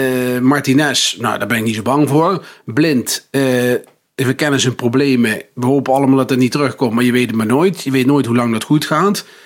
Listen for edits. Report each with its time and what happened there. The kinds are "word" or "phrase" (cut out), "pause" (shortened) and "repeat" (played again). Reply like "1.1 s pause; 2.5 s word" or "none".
none